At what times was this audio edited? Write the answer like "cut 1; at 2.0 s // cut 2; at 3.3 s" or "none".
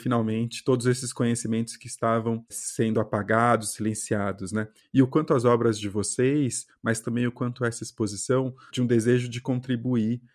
cut 1; at 2.5 s // cut 2; at 8.7 s